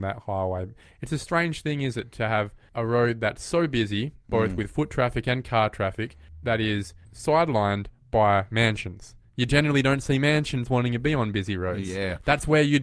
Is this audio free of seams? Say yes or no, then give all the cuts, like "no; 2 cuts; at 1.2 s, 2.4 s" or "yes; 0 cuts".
yes; 0 cuts